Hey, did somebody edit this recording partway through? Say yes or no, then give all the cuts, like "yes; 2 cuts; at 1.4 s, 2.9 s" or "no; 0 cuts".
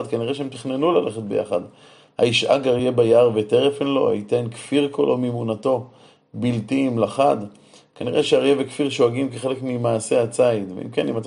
no; 0 cuts